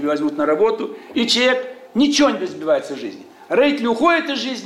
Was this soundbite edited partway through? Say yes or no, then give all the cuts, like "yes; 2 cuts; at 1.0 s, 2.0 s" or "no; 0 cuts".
no; 0 cuts